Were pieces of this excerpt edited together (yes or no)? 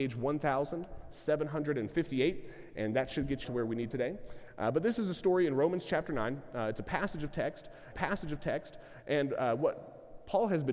yes